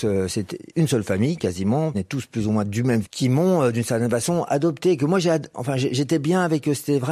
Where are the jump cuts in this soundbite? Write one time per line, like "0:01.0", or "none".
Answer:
0:01.9
0:03.0